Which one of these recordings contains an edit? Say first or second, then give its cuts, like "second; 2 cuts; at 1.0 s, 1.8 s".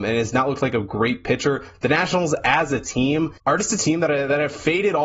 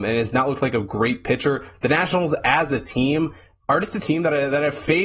first; 1 cut; at 3.4 s